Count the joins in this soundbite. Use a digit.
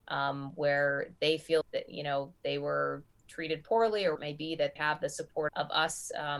4